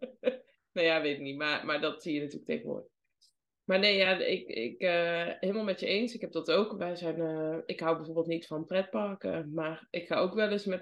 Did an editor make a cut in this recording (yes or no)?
no